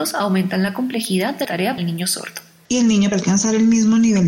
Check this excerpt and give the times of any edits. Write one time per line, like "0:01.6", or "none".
0:01.4
0:01.8
0:03.1